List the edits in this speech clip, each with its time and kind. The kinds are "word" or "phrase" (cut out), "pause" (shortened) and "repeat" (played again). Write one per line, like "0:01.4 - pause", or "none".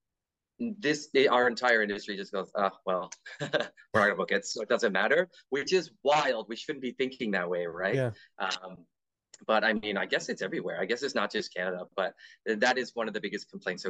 none